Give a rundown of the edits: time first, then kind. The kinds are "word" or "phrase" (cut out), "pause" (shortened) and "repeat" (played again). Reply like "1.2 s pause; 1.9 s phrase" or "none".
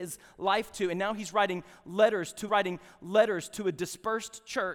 2.5 s repeat